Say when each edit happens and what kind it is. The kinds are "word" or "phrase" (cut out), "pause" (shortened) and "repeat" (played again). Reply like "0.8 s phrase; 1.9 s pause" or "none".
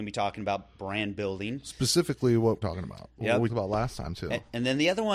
2.6 s phrase; 3.5 s word